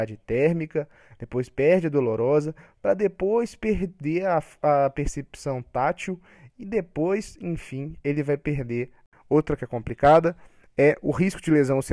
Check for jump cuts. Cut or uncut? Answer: cut